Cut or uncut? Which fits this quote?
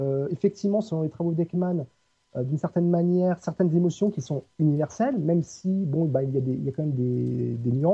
uncut